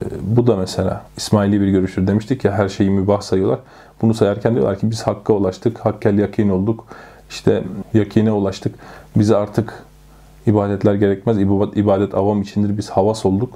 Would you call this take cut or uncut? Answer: cut